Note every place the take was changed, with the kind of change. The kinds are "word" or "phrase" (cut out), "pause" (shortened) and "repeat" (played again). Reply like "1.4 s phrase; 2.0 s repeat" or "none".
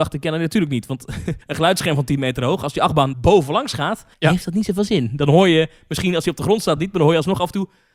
1.4 s pause; 3.1 s word; 4.1 s pause